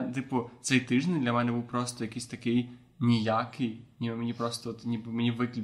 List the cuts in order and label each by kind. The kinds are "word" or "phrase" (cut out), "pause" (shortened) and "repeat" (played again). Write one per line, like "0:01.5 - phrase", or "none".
none